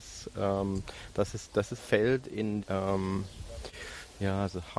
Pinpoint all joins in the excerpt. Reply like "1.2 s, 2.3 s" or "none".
1.8 s, 2.6 s